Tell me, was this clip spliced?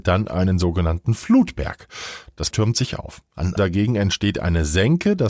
yes; 2 cuts; at 2.5 s, 3.6 s

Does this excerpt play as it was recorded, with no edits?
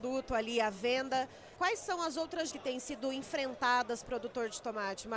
no; 3 cuts; at 1.6 s, 2.5 s, 4.0 s

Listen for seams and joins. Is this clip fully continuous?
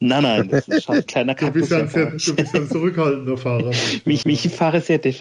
no; 3 cuts; at 1.1 s, 2.7 s, 4.2 s

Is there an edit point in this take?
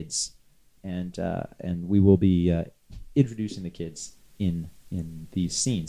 no; 0 cuts

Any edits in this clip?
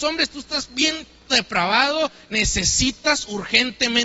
yes; 1 cut; at 1.3 s

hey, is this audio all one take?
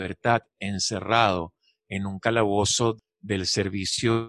yes; 0 cuts

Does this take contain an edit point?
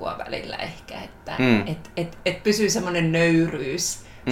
no; 0 cuts

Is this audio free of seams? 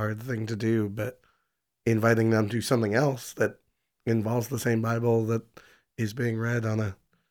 yes; 0 cuts

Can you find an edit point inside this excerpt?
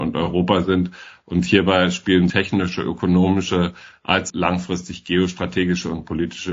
yes; 2 cuts; at 2.3 s, 4.3 s

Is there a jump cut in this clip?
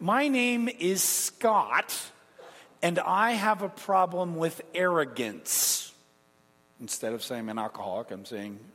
no; 0 cuts

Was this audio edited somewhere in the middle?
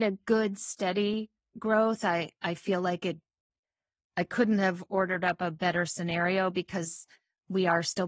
no; 0 cuts

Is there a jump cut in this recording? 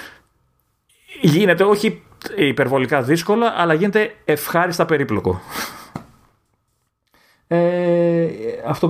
no; 0 cuts

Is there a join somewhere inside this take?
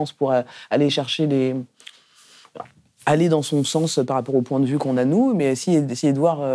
no; 0 cuts

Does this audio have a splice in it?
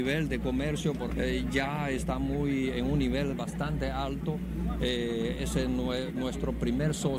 yes; 1 cut; at 1.1 s

